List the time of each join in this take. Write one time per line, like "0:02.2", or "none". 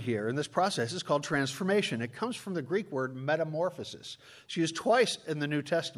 none